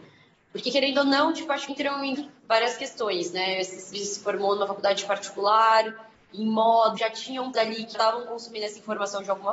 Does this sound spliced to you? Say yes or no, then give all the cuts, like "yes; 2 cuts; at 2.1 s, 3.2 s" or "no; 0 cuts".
yes; 6 cuts; at 1.7 s, 2.2 s, 3.9 s, 7.0 s, 7.5 s, 7.9 s